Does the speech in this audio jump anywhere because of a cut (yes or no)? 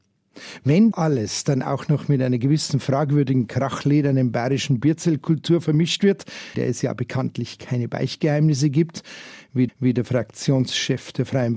yes